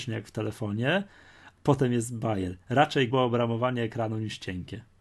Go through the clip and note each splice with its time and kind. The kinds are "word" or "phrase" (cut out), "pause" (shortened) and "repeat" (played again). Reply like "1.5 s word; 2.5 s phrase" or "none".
1.6 s word; 3.1 s word